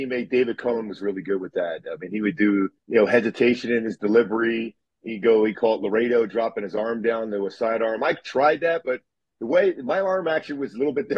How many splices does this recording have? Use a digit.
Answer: 1